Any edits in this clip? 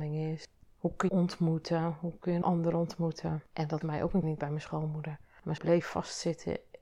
yes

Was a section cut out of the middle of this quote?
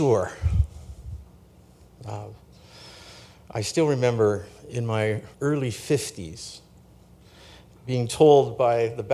yes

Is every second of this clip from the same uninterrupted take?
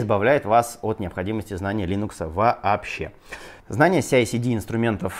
no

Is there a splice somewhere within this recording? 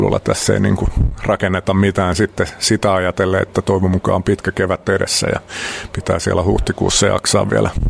no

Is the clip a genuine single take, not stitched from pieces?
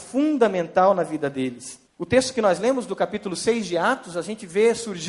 no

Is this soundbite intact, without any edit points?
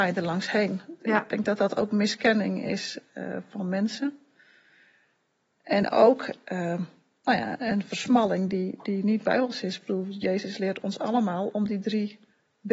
yes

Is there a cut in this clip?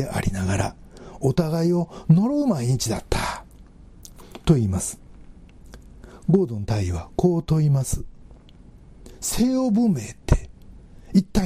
no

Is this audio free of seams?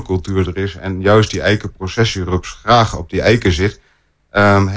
yes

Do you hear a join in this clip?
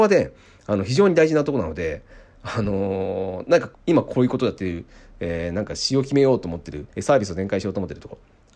yes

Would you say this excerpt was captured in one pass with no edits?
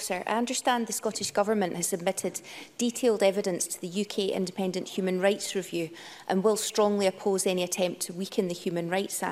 yes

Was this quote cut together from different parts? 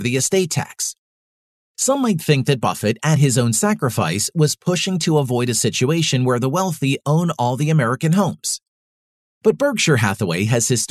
no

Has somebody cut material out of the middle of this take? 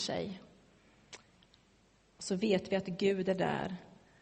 no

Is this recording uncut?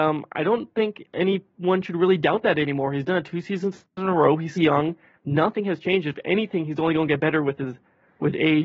no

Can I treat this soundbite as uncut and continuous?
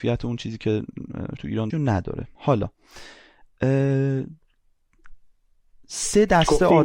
no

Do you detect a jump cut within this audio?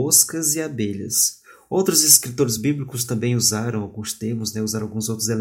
no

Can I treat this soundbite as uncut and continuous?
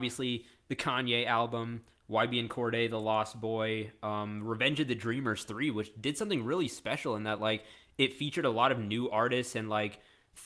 yes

